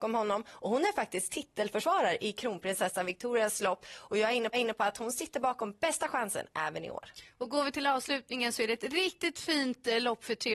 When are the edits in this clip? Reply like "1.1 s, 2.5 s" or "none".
4.5 s